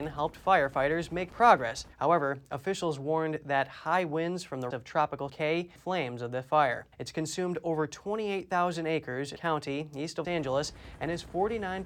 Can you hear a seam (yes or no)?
yes